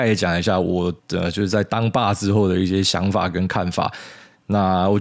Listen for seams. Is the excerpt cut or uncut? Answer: cut